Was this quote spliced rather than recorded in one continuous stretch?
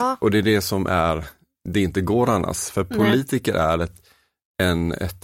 no; 0 cuts

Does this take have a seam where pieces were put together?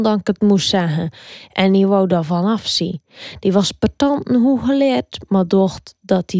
no; 0 cuts

